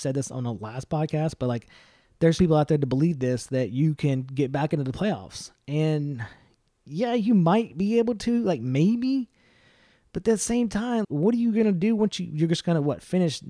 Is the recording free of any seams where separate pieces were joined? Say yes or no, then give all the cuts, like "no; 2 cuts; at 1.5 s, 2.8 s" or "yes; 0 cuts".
no; 2 cuts; at 2.4 s, 11.0 s